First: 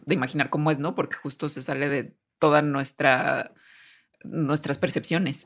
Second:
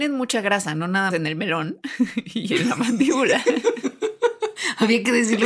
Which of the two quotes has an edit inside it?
second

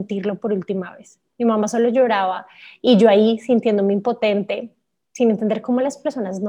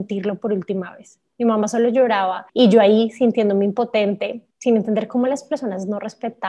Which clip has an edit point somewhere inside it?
second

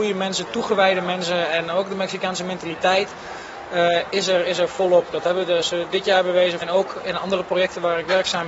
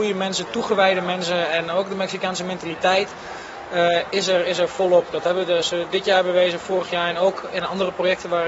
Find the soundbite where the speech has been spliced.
first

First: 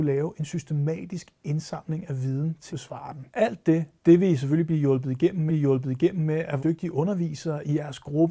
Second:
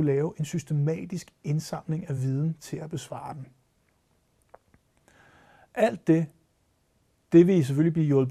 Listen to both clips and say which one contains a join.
first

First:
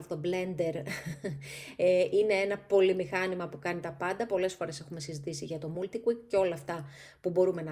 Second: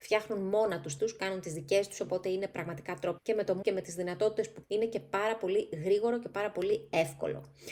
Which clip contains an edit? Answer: second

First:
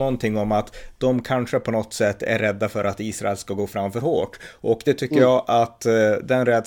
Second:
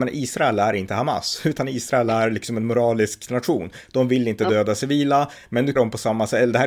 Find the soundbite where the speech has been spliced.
second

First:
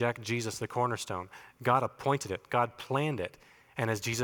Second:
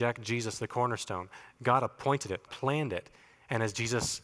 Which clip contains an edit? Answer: second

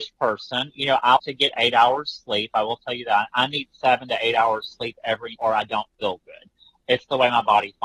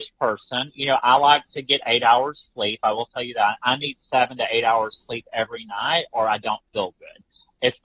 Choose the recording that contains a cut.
first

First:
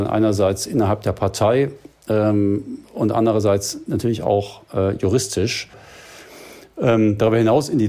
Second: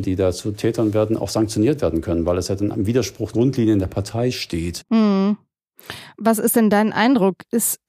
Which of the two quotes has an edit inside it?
second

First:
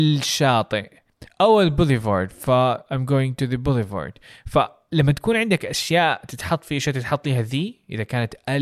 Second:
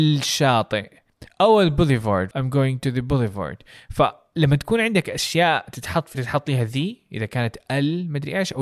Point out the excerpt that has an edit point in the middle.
second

